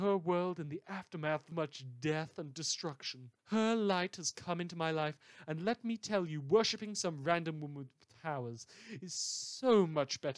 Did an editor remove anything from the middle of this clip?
yes; 2 cuts; at 1.5 s, 3.4 s

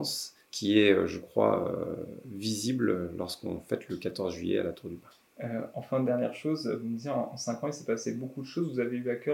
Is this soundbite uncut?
yes; 0 cuts

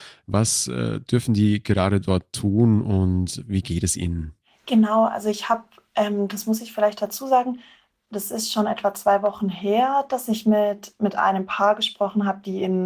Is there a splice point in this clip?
no; 0 cuts

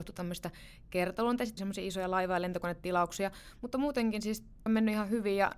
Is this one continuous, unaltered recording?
no; 2 cuts; at 1.6 s, 4.7 s

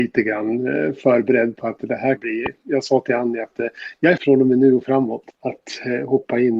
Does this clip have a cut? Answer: yes; 3 cuts; at 2.2 s, 4.2 s, 5.3 s

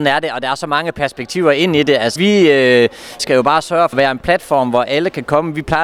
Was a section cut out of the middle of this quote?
yes; 3 cuts; at 2.2 s, 3.2 s, 3.9 s

